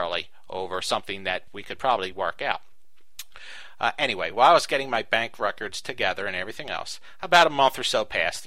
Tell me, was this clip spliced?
no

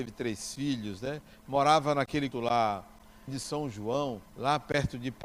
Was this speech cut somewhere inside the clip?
yes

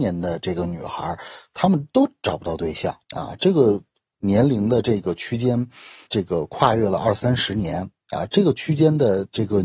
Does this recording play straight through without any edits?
no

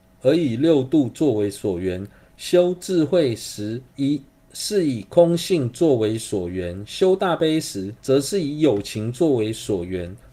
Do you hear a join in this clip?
yes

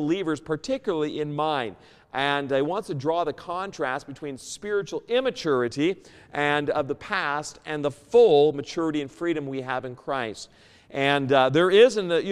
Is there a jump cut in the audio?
no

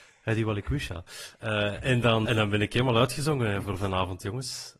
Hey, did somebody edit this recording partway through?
yes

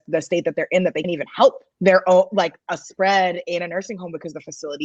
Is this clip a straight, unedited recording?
no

